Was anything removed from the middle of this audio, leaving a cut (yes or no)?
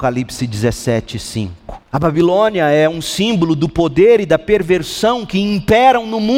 yes